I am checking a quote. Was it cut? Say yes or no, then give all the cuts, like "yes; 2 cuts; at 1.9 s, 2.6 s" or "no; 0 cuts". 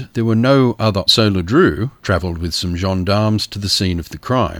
yes; 1 cut; at 1.1 s